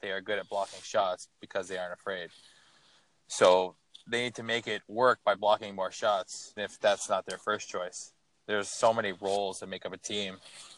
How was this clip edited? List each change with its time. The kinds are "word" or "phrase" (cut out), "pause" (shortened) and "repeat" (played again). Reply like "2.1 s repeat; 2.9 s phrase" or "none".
6.6 s word

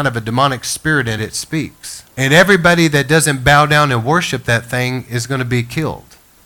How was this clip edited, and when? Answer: 1.2 s phrase; 2.1 s pause

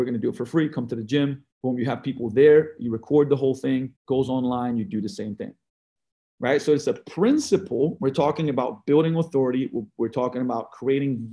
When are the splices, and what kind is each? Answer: 1.5 s pause; 4.0 s pause

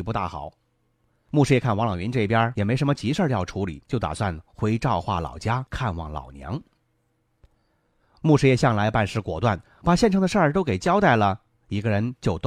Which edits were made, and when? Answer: 3.8 s pause; 9.6 s phrase

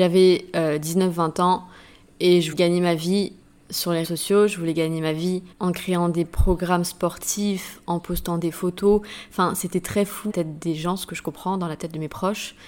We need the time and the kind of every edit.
2.5 s word; 4.0 s word; 5.5 s pause; 10.3 s phrase

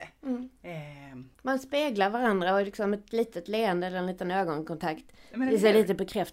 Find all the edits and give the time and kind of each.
1.3 s pause

